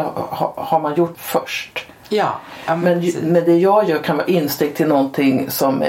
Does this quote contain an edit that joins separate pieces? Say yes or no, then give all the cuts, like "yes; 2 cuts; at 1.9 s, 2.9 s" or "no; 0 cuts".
yes; 1 cut; at 1.1 s